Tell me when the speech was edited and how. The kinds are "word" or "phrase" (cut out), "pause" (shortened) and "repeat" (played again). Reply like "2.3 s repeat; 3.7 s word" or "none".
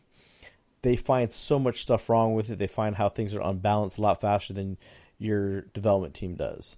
none